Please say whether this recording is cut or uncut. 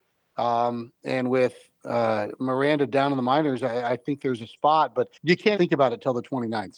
cut